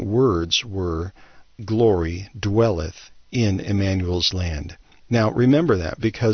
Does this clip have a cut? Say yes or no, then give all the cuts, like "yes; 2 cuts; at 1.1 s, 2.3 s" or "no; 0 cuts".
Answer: yes; 1 cut; at 1.6 s